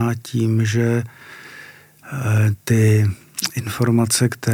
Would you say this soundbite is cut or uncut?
cut